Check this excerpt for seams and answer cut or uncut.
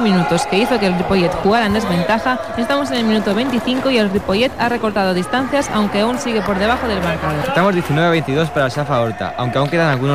uncut